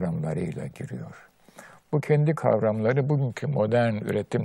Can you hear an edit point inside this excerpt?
no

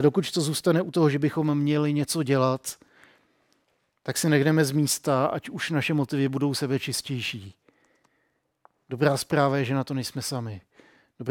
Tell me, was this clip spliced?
no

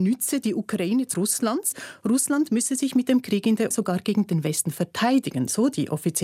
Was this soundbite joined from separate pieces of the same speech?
yes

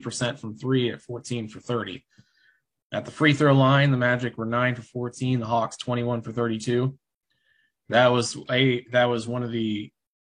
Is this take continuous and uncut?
yes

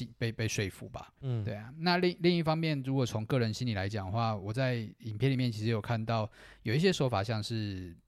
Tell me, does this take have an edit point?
yes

